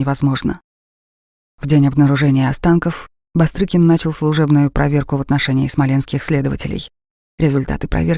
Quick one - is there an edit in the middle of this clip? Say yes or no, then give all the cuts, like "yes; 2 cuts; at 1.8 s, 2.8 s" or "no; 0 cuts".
no; 0 cuts